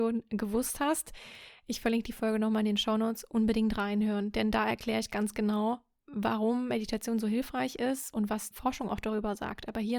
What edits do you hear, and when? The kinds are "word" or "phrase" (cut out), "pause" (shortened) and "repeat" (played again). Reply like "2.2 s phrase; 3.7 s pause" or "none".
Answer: 8.5 s word